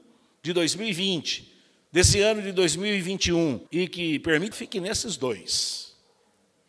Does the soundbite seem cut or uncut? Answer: cut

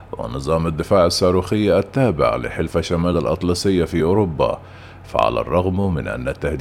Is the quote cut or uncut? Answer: uncut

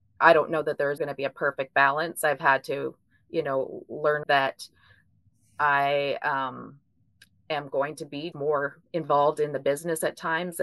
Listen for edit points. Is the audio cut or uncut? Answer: cut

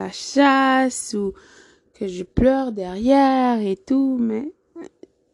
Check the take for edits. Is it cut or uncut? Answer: uncut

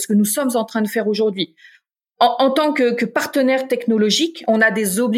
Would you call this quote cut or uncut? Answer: uncut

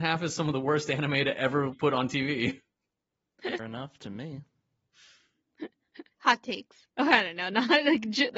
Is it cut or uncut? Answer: cut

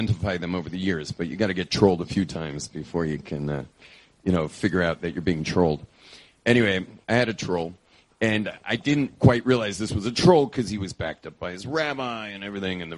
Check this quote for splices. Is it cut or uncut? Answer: uncut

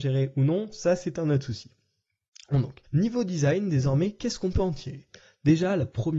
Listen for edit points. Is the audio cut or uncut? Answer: cut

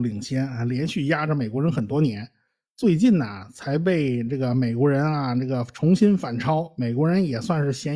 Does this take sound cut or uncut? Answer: uncut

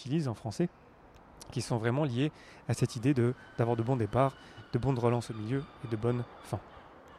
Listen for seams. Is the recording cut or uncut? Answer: uncut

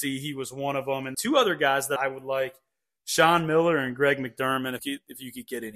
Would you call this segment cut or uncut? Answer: cut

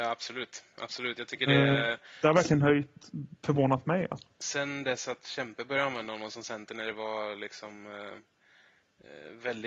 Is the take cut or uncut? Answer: cut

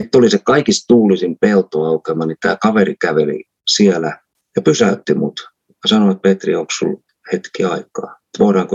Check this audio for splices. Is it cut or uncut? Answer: uncut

